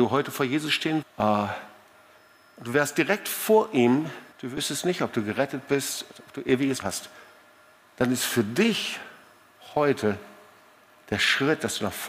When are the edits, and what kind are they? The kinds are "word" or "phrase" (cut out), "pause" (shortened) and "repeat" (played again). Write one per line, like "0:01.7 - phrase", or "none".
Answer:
0:01.0 - phrase
0:04.3 - pause
0:06.8 - word
0:07.7 - pause